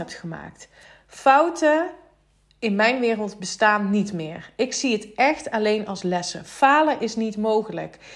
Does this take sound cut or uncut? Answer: uncut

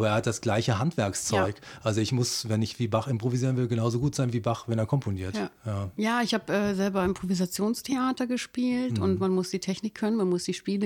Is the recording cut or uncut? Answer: uncut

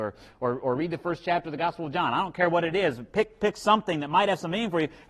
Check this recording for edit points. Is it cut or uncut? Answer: uncut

